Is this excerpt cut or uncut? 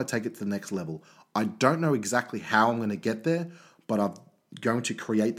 uncut